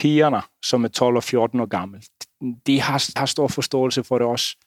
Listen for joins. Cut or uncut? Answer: cut